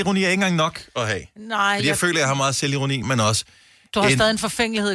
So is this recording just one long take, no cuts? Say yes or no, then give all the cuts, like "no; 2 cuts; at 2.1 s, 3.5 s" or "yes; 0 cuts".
no; 1 cut; at 3.0 s